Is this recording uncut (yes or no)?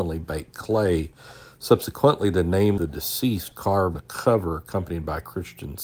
no